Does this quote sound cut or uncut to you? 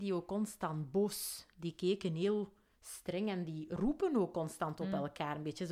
uncut